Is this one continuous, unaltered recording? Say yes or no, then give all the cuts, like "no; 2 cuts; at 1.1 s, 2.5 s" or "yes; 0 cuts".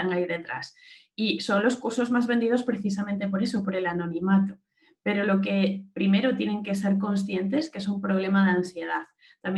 yes; 0 cuts